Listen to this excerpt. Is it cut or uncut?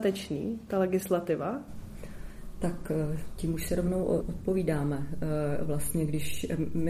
cut